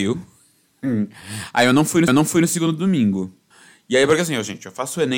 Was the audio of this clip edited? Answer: yes; 2 cuts; at 2.1 s, 3.5 s

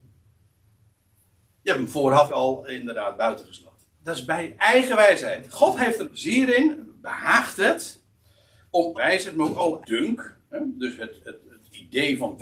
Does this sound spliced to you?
yes; 6 cuts; at 2.3 s, 3.9 s, 4.6 s, 6.0 s, 8.9 s, 9.8 s

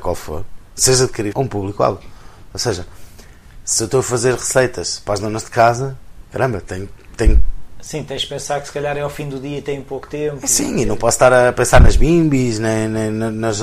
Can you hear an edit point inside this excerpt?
yes; 1 cut; at 1.3 s

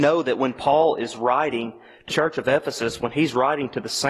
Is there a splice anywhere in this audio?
yes; 1 cut; at 2.1 s

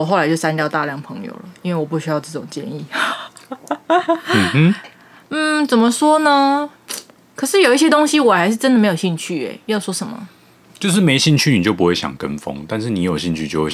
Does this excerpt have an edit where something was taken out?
no; 0 cuts

